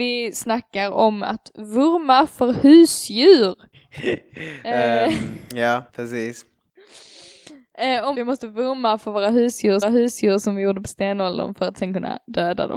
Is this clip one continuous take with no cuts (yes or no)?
no